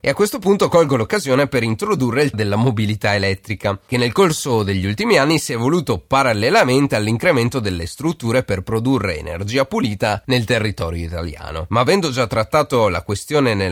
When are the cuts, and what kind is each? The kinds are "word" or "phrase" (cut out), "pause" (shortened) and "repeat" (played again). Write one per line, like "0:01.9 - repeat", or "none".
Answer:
0:02.3 - word